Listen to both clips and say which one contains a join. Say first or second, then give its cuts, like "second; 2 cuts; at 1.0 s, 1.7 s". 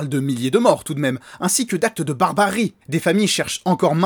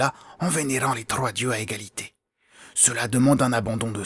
first; 1 cut; at 2.8 s